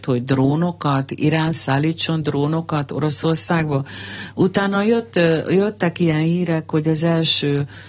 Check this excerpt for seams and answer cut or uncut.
uncut